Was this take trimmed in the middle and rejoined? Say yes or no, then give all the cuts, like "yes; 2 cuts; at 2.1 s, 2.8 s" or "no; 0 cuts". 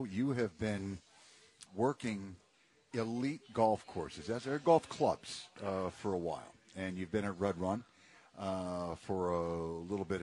yes; 1 cut; at 1.7 s